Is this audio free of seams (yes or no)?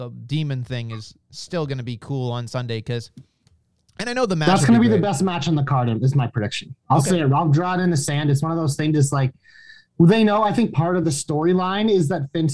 yes